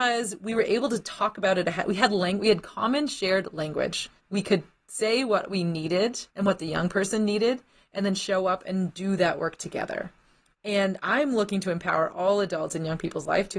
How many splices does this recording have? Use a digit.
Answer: 2